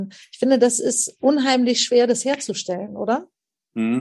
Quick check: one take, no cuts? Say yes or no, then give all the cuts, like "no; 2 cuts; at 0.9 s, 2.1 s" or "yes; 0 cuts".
yes; 0 cuts